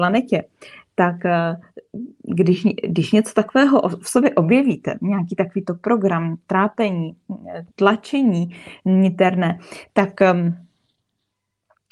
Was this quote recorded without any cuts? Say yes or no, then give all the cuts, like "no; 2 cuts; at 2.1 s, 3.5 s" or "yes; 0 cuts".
no; 1 cut; at 7.7 s